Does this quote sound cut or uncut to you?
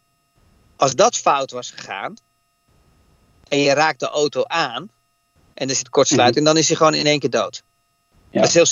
uncut